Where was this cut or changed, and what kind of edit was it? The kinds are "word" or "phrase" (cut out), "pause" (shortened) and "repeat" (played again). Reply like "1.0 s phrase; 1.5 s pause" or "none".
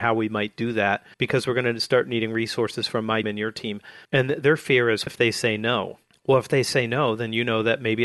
1.1 s pause; 3.2 s word; 4.0 s pause; 5.1 s word; 6.1 s pause